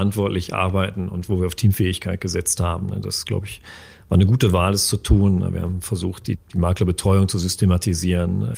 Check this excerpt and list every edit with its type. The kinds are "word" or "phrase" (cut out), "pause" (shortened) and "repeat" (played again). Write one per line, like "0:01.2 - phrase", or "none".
none